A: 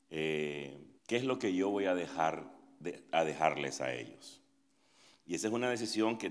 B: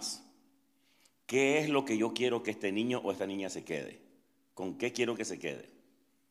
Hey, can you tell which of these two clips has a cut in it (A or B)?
A